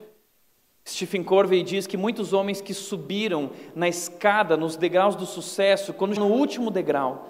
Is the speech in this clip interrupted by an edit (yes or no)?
yes